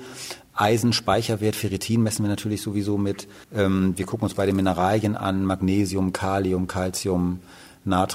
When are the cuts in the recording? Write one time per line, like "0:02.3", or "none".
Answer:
0:03.4